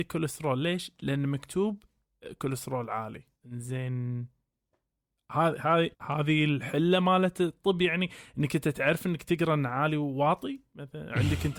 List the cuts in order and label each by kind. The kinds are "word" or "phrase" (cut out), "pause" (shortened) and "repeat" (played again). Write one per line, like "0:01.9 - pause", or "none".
0:03.3 - pause
0:05.9 - pause